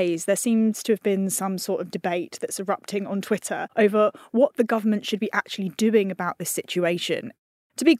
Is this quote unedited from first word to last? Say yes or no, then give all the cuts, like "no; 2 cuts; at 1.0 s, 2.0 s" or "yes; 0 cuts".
yes; 0 cuts